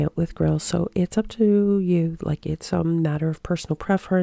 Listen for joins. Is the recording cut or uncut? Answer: uncut